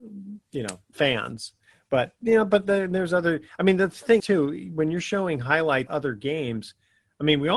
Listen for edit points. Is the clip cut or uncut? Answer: cut